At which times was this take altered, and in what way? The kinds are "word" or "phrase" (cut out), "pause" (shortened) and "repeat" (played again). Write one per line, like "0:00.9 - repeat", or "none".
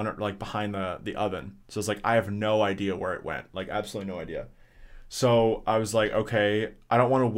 0:01.6 - pause